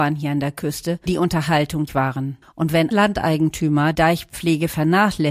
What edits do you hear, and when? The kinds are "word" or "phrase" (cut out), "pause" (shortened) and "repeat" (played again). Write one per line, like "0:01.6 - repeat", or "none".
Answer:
0:01.1 - word
0:01.9 - phrase
0:02.4 - pause
0:02.9 - word
0:03.9 - word